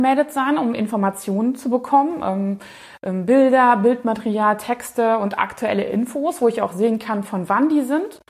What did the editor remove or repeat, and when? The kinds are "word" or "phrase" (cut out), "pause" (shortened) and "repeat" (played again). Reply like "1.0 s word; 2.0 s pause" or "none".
none